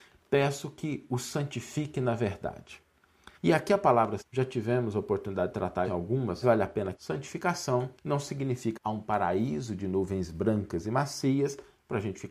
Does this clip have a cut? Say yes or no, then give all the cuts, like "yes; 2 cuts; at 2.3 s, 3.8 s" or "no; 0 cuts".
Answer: yes; 7 cuts; at 3.4 s, 4.2 s, 5.8 s, 6.4 s, 6.9 s, 7.9 s, 8.7 s